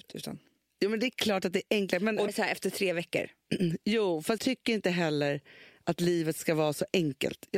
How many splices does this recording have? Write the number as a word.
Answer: two